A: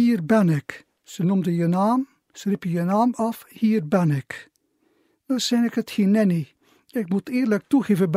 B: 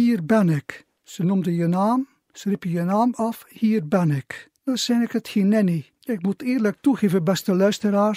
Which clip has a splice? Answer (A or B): B